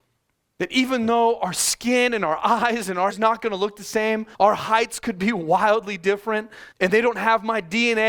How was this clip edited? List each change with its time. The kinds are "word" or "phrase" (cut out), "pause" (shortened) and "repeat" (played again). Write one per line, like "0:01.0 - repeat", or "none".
0:03.1 - word
0:04.3 - pause
0:06.7 - pause

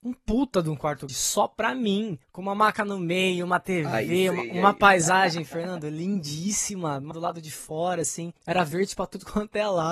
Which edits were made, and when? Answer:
0:01.1 - word
0:02.2 - pause
0:07.1 - word
0:08.4 - pause

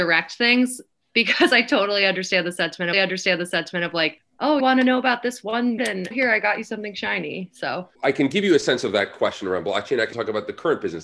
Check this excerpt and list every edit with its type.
0:02.9 - repeat
0:04.6 - word
0:05.8 - word
0:06.1 - word
0:07.9 - pause
0:10.1 - word

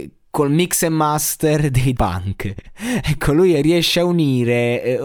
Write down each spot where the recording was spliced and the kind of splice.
0:01.9 - word
0:03.5 - word

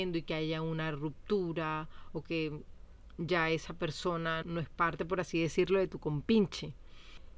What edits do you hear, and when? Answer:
0:04.4 - word

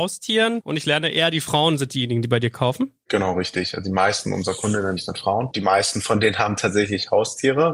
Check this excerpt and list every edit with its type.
none

